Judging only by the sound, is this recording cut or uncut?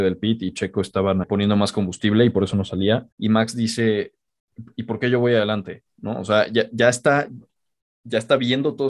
cut